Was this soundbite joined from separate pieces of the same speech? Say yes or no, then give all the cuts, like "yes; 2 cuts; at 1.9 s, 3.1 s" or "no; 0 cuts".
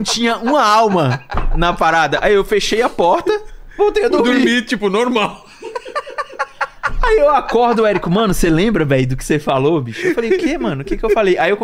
no; 0 cuts